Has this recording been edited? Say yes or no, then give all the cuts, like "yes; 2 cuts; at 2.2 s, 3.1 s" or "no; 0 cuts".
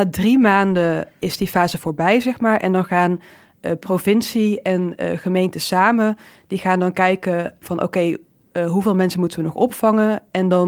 no; 0 cuts